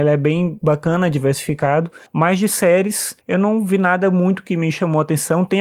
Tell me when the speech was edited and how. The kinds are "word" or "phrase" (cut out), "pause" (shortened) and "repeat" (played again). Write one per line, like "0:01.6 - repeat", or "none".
0:02.1 - pause
0:03.2 - pause

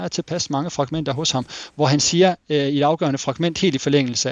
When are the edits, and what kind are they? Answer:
none

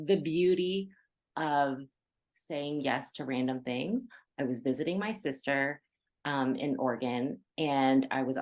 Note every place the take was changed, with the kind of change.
none

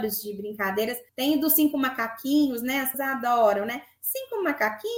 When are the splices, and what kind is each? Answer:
0:01.1 - pause
0:02.9 - word

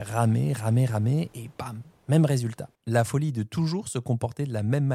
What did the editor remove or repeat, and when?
0:02.7 - pause

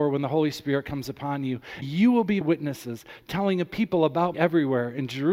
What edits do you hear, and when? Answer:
0:01.8 - word
0:02.4 - word
0:04.3 - word

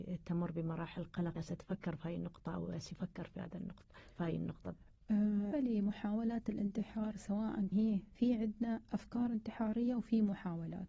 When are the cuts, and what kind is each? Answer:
0:01.4 - phrase
0:05.5 - word
0:07.7 - phrase

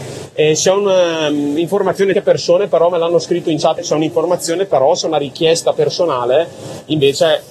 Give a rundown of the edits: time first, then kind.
0:02.1 - phrase
0:03.8 - word

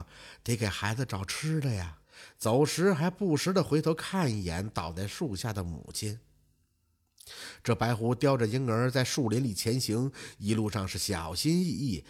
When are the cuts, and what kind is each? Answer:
0:02.0 - pause

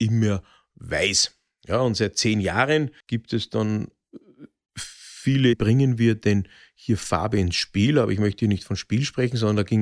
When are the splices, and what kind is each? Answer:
0:03.0 - pause
0:05.5 - phrase

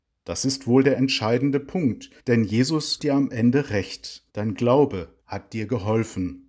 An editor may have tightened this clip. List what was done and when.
0:02.2 - pause
0:03.0 - word
0:04.3 - pause
0:05.2 - pause

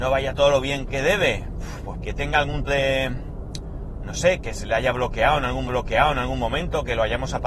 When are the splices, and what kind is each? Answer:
0:02.0 - phrase
0:02.7 - word
0:05.7 - repeat

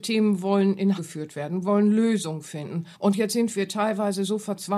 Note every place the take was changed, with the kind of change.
0:01.0 - word
0:02.9 - pause

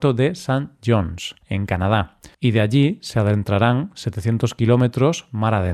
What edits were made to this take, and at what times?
0:01.4 - pause
0:02.3 - pause

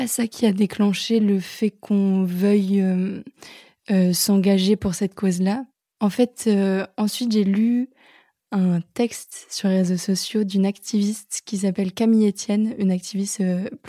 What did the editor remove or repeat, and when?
none

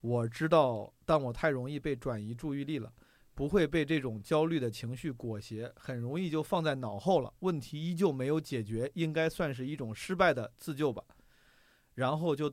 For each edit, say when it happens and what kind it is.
none

